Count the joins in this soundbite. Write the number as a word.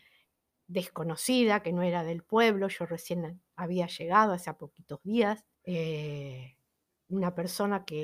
one